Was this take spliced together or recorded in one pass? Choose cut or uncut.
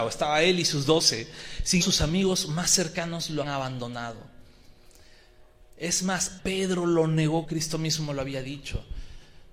cut